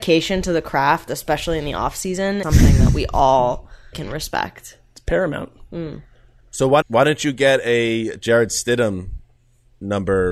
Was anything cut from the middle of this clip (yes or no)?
yes